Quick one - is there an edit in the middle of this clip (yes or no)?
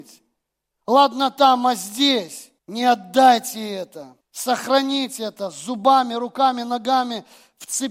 yes